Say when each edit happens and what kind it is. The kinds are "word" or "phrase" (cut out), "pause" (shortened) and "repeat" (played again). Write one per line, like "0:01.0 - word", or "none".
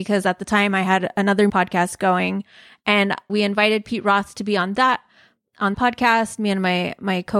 0:01.5 - word
0:03.3 - word
0:05.7 - word